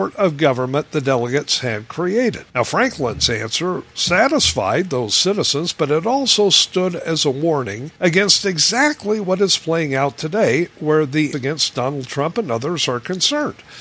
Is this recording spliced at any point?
yes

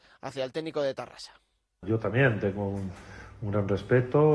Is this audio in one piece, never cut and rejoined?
yes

